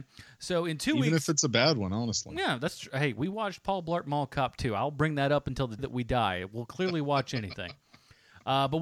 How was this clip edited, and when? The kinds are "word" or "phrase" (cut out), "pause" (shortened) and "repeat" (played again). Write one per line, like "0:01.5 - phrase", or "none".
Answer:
0:05.8 - word